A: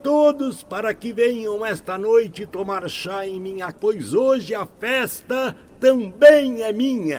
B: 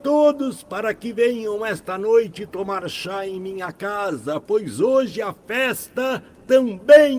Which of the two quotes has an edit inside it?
A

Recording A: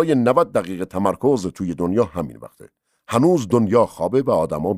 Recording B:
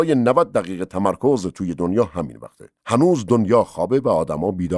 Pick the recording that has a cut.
B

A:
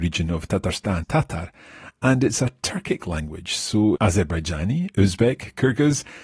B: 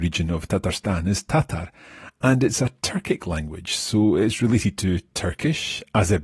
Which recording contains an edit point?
A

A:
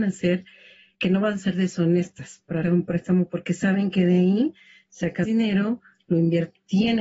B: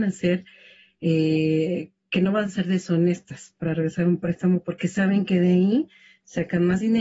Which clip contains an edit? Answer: A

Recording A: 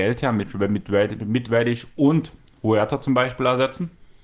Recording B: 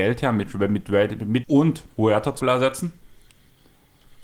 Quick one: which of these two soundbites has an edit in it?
B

